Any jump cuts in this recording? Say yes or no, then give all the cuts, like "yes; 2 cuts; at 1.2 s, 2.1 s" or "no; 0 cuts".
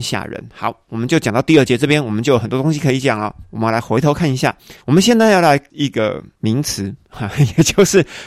yes; 2 cuts; at 4.8 s, 5.7 s